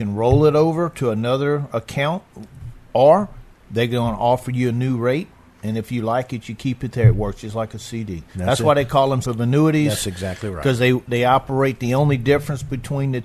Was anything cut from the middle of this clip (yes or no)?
yes